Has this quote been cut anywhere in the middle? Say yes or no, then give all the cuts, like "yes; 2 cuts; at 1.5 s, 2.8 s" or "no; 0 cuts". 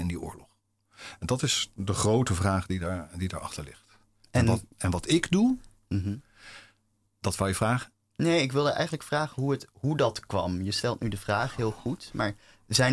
no; 0 cuts